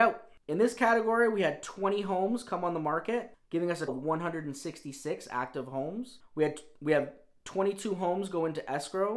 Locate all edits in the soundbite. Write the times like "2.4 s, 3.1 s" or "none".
3.9 s

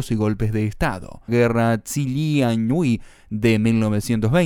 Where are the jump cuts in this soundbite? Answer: 1.3 s

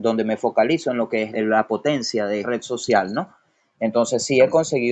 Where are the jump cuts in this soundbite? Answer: 1.3 s, 2.4 s

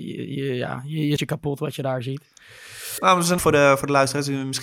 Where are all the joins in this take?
1.2 s, 3.4 s

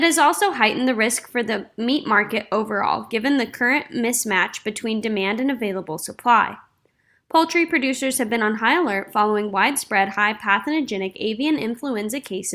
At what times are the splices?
none

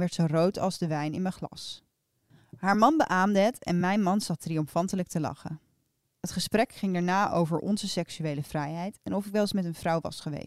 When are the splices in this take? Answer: none

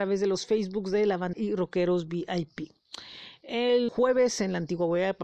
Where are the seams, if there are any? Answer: 1.3 s, 3.9 s

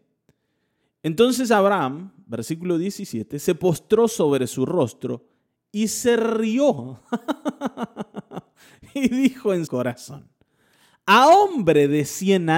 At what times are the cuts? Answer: 9.7 s

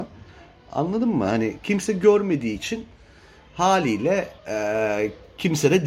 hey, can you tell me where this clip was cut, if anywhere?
4.4 s

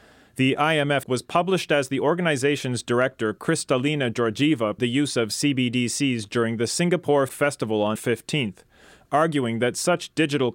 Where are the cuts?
1.0 s, 4.8 s, 7.3 s, 8.0 s

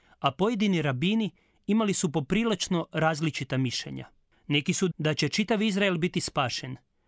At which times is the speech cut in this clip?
4.9 s

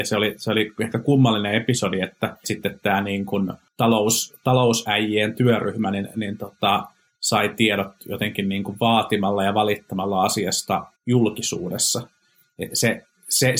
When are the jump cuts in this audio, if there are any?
2.4 s, 10.9 s, 12.7 s

